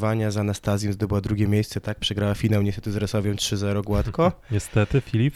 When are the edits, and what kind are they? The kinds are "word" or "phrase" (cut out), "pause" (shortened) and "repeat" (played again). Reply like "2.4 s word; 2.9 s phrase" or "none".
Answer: none